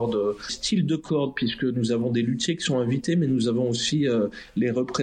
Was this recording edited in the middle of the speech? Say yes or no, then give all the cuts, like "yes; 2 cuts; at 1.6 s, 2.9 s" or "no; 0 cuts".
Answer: no; 0 cuts